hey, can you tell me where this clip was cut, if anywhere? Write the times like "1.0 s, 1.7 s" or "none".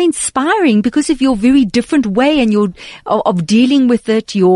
none